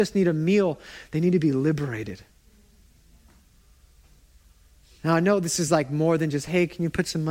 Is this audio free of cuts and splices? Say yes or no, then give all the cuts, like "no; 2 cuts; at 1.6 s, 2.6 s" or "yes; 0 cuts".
yes; 0 cuts